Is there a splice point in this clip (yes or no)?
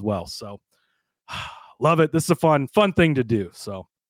no